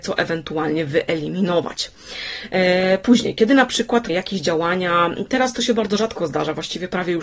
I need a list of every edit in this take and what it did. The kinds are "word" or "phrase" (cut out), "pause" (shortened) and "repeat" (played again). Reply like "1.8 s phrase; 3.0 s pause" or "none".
4.1 s word